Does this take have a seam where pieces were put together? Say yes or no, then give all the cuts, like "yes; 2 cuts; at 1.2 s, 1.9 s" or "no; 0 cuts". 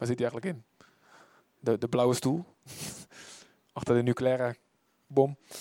no; 0 cuts